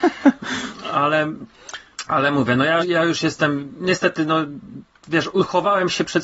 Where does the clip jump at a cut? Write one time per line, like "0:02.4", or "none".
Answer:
0:02.8